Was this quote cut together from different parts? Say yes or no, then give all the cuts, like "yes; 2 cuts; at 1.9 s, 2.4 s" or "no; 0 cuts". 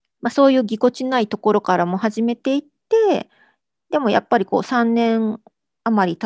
no; 0 cuts